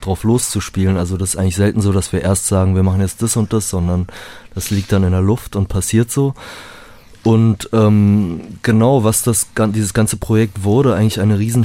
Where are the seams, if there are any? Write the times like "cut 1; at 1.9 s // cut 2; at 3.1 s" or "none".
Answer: none